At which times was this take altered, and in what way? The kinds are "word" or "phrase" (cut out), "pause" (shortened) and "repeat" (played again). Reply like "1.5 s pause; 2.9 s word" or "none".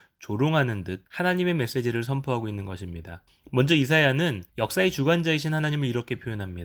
1.1 s pause; 3.3 s pause; 4.5 s pause

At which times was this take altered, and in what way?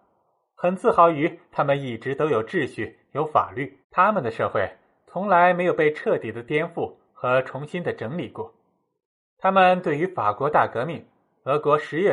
3.8 s pause

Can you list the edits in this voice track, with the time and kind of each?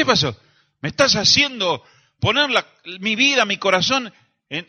none

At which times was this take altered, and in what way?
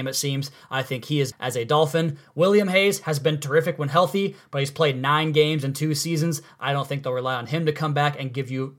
1.3 s word

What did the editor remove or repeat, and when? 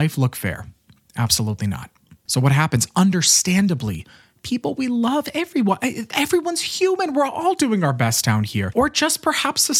none

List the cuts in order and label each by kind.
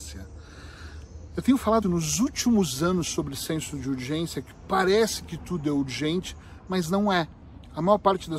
1.8 s word

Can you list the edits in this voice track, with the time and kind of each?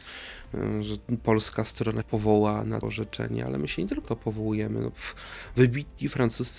2.0 s word; 2.8 s word; 4.0 s word

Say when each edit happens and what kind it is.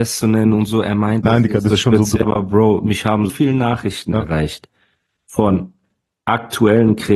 2.2 s word; 3.3 s word

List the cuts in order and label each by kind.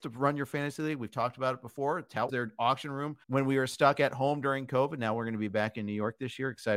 2.3 s phrase; 3.2 s pause

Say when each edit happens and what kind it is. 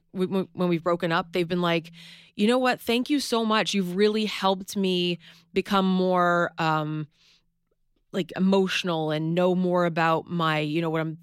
none

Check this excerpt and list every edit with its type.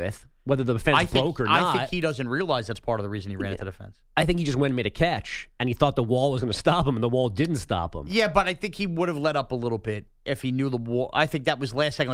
none

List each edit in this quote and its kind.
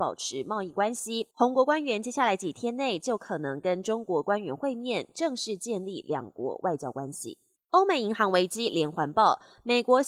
1.3 s pause; 7.6 s pause

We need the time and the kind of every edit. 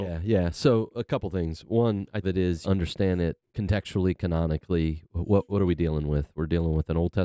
2.2 s phrase; 2.6 s phrase; 3.4 s word

